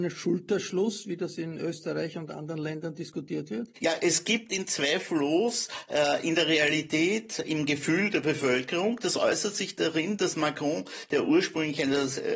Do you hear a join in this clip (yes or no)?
no